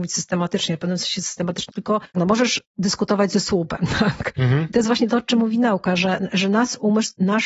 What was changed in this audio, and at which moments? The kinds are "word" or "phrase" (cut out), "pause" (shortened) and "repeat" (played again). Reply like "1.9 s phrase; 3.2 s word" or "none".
1.7 s word; 2.1 s phrase